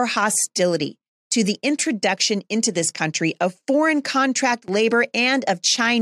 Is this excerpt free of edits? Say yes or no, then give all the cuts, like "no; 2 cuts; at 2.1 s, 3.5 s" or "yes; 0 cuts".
yes; 0 cuts